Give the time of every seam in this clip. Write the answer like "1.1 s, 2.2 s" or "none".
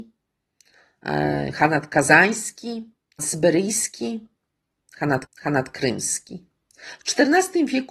3.2 s, 5.2 s